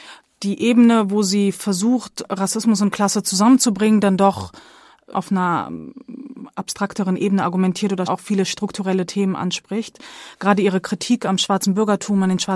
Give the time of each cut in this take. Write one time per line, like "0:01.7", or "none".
0:05.1
0:08.1